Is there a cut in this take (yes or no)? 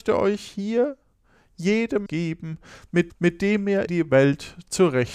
yes